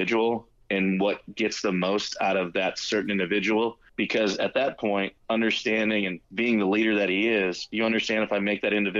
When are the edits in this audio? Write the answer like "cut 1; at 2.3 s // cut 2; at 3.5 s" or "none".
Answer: cut 1; at 3.9 s // cut 2; at 6.2 s